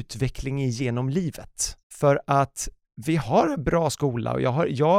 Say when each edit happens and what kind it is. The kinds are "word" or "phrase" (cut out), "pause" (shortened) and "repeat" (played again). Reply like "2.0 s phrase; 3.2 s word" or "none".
1.8 s pause